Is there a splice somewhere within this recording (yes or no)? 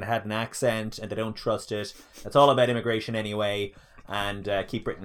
no